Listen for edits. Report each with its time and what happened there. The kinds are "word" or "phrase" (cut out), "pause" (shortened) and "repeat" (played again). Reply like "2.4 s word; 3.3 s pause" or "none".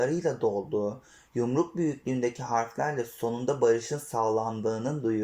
none